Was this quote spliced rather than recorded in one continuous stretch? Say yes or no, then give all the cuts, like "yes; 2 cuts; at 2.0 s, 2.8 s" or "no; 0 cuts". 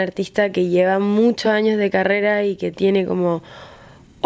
no; 0 cuts